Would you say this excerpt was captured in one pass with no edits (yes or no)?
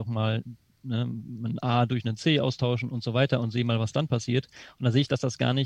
yes